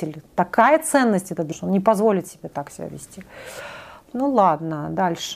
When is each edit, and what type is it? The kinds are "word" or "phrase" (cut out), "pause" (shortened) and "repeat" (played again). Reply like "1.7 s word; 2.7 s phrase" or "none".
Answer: 1.5 s word